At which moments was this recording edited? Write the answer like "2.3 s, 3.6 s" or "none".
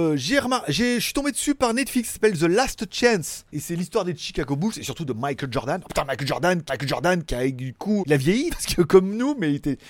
3.5 s, 6.7 s, 8.0 s, 8.5 s